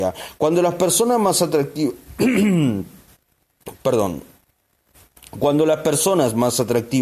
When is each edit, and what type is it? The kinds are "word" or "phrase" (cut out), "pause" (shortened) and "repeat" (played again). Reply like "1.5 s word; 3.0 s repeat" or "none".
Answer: 3.8 s pause